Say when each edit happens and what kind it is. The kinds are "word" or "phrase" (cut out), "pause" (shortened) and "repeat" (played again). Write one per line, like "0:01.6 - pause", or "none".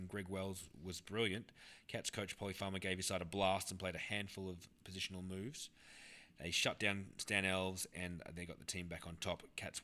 none